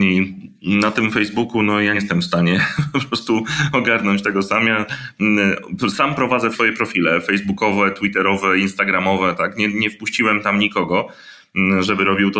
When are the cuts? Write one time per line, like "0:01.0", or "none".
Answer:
0:01.9
0:06.5